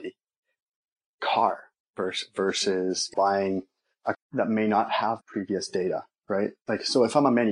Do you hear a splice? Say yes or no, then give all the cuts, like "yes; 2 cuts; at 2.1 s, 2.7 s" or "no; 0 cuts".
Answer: yes; 3 cuts; at 3.1 s, 4.1 s, 5.2 s